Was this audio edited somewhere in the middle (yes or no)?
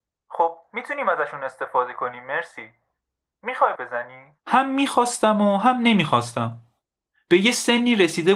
yes